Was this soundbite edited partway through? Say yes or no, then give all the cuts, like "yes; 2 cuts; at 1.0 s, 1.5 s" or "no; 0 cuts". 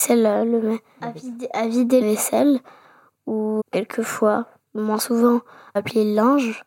yes; 4 cuts; at 1.0 s, 2.0 s, 3.6 s, 5.8 s